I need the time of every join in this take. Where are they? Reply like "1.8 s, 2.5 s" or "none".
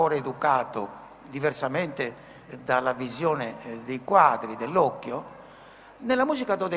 none